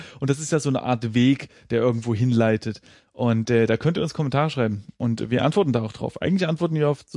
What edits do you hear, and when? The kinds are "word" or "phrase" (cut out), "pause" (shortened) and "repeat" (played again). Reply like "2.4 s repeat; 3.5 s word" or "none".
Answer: none